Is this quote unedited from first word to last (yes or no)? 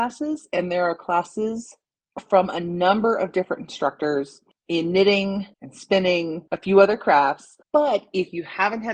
no